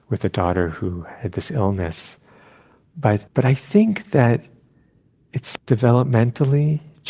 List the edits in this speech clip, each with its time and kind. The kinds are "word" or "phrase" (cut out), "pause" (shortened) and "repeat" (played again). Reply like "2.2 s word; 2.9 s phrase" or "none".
3.3 s pause; 5.6 s word